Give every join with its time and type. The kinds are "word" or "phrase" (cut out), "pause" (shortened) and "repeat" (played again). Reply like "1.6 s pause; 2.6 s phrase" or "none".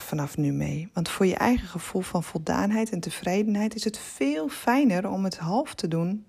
none